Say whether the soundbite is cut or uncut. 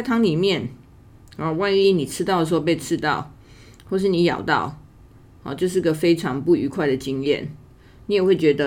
uncut